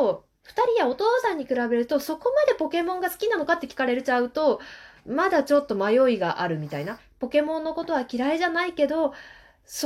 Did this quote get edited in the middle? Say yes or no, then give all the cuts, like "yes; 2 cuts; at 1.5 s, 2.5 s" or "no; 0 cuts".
no; 0 cuts